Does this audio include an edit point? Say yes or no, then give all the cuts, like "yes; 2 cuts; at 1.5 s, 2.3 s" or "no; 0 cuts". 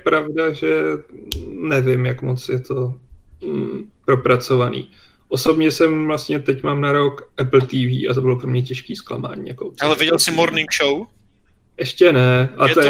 no; 0 cuts